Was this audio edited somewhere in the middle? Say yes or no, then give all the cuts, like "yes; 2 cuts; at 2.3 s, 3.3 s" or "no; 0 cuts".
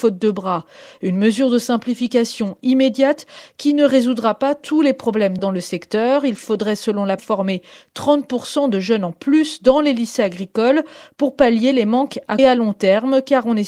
yes; 3 cuts; at 5.4 s, 7.2 s, 12.4 s